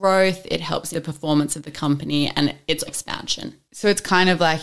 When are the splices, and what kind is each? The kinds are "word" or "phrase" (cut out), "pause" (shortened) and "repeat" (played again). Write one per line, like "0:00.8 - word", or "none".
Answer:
0:00.9 - word
0:02.9 - word